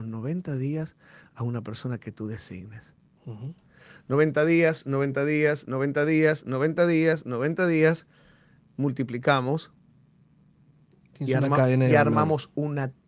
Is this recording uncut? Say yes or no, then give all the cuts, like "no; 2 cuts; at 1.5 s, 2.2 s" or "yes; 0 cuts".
yes; 0 cuts